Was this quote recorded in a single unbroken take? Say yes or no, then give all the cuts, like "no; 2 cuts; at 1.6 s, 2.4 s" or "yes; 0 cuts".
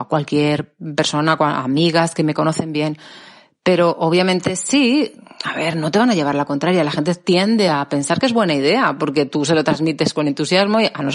yes; 0 cuts